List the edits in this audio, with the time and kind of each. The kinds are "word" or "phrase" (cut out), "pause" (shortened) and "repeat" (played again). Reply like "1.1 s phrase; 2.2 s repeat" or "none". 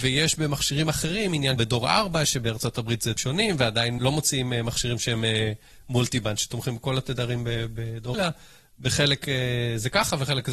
1.6 s phrase; 3.2 s word; 4.0 s word; 8.1 s word